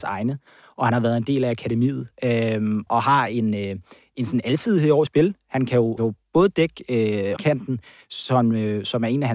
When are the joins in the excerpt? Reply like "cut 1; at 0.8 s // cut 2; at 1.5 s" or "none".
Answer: cut 1; at 2.9 s // cut 2; at 5.1 s // cut 3; at 6.0 s // cut 4; at 7.4 s